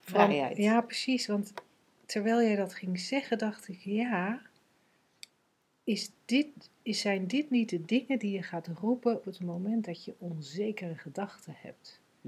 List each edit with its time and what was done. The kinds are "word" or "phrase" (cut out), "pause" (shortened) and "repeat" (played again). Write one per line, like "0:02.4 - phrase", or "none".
0:09.2 - word